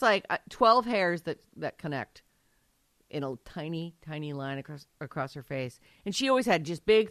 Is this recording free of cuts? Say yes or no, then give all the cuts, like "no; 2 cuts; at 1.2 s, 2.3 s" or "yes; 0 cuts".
yes; 0 cuts